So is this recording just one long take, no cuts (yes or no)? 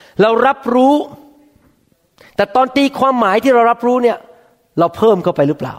yes